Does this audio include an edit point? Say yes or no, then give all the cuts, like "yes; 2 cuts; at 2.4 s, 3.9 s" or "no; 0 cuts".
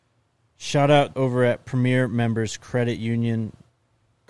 yes; 1 cut; at 1.1 s